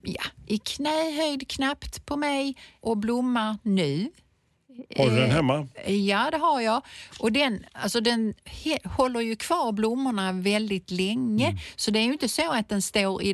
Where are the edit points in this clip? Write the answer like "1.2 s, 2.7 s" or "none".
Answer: 2.8 s

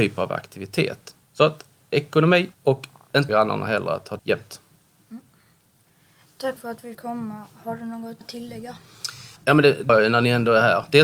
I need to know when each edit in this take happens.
1.2 s, 2.5 s, 3.3 s, 4.2 s, 6.6 s, 6.9 s, 8.2 s, 9.4 s, 9.9 s

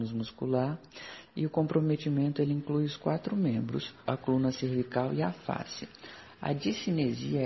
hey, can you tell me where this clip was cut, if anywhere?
4.1 s

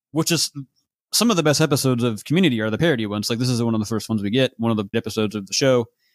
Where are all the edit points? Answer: 4.9 s

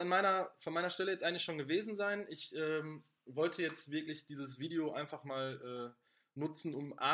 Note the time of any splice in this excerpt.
none

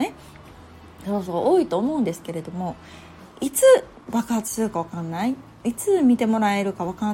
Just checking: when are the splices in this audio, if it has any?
3.3 s

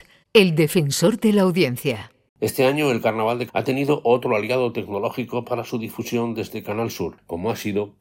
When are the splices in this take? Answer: 3.5 s

